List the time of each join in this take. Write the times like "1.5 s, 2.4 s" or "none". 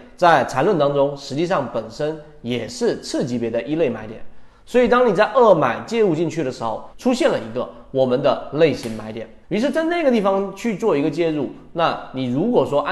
9.4 s